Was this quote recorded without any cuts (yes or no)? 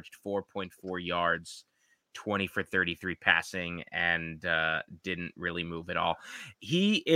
yes